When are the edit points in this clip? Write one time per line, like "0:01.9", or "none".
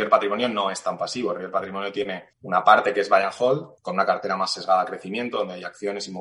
0:02.3
0:03.8